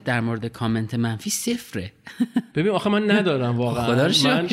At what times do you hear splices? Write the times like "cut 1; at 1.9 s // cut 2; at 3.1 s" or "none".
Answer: cut 1; at 2.5 s